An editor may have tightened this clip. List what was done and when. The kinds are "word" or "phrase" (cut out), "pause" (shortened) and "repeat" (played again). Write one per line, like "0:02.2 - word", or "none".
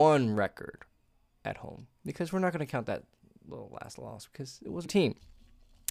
0:04.9 - word

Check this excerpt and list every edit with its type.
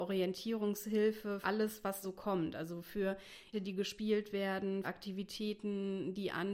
0:01.4 - word
0:02.0 - word
0:03.5 - word
0:04.8 - word

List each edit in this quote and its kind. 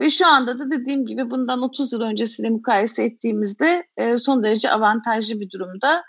none

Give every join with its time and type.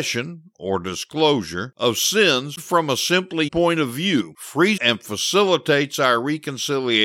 0:02.6 - word
0:03.5 - word
0:04.8 - word

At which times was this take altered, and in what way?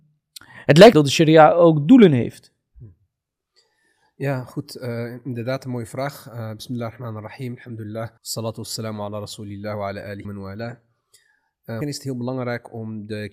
0:00.9 - word
0:08.2 - pause
0:10.2 - phrase
0:11.8 - word

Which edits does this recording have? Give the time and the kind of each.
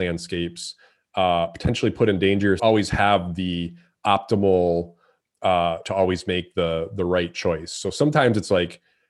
0:02.6 - phrase
0:05.8 - word

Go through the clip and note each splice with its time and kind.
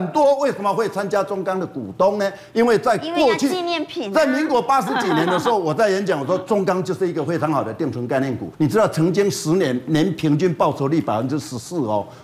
0:08.5 - pause

